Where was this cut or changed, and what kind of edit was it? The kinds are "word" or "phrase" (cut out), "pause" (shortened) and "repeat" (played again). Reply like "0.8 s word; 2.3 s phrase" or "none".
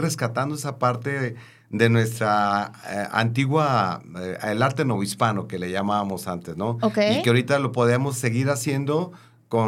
none

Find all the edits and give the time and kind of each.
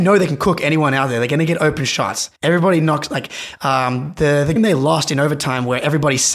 2.4 s pause; 4.6 s word

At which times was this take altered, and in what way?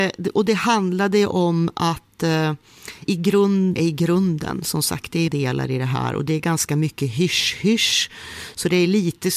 3.1 s word; 3.8 s word; 5.3 s word

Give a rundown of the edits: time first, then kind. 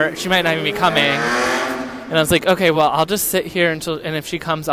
none

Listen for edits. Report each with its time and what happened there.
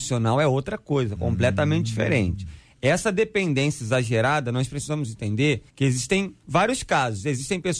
5.7 s pause; 6.4 s pause

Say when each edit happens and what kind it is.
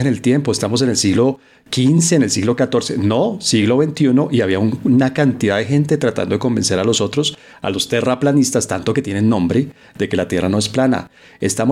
none

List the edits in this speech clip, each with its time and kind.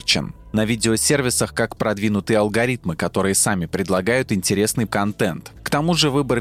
1.8 s phrase; 4.9 s word

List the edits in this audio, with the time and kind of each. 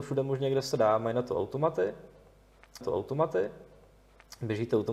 2.8 s repeat

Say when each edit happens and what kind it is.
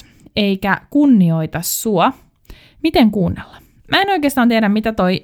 none

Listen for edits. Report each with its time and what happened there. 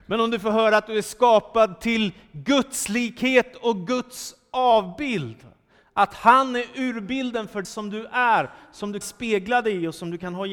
7.6 s word; 9.0 s word

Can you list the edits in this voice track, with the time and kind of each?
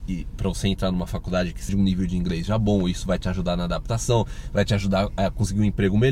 1.7 s word

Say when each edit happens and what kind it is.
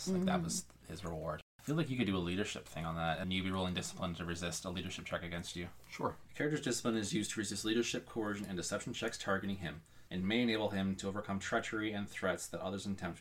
3.2 s word; 10.1 s pause

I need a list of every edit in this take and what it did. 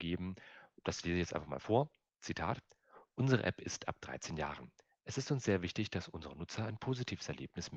none

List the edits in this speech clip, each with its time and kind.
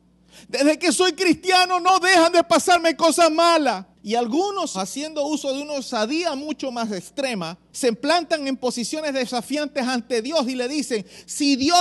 3.9 s pause; 4.7 s word

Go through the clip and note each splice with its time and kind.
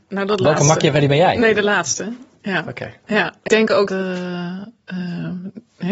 3.5 s word; 3.9 s word

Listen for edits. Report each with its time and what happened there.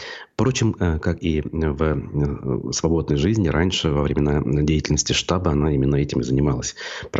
none

